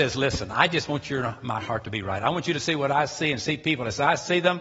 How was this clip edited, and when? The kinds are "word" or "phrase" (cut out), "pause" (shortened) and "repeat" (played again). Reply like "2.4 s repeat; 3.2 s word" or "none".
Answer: none